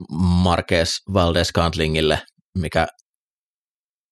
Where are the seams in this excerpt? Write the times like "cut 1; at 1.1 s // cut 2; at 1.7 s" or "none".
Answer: none